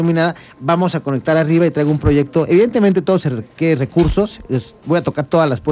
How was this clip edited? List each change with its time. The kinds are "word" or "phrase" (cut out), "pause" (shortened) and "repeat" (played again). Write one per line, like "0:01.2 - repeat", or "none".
none